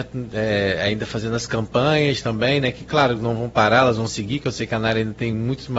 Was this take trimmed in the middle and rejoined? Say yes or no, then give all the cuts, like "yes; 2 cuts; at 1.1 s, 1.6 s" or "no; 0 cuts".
no; 0 cuts